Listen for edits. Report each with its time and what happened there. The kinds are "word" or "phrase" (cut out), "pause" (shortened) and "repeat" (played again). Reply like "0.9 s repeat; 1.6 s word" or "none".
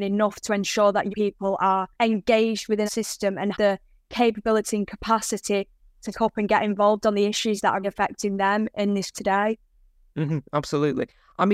1.1 s word; 1.9 s pause; 2.9 s word; 3.5 s word; 6.1 s word; 7.8 s word; 9.1 s word